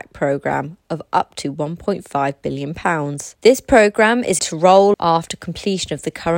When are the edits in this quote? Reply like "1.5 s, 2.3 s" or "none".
3.3 s, 4.4 s, 4.9 s